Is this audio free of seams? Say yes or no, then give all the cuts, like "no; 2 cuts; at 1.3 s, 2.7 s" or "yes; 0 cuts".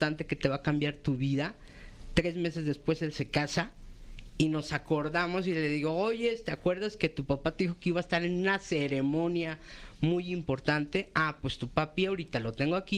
yes; 0 cuts